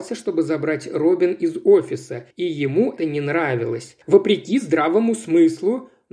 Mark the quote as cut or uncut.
cut